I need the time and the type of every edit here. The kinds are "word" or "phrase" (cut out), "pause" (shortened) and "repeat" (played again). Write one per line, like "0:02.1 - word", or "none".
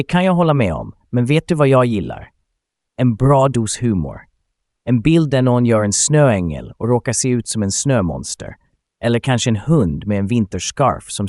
none